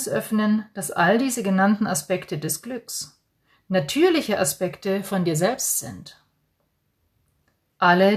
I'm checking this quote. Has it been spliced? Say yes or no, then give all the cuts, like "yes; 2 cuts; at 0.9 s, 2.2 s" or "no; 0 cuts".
no; 0 cuts